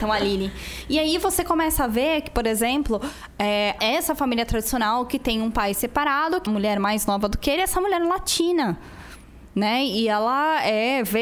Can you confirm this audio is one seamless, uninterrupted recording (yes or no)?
no